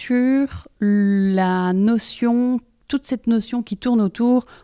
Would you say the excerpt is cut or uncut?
uncut